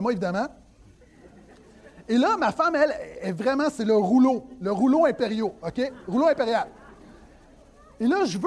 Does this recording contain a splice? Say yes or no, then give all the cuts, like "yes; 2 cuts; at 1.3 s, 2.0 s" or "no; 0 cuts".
no; 0 cuts